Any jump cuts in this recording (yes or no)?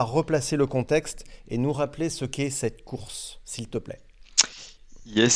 no